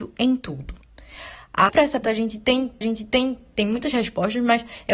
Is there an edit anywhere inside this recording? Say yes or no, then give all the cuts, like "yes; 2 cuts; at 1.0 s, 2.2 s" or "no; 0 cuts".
yes; 3 cuts; at 1.7 s, 2.0 s, 2.8 s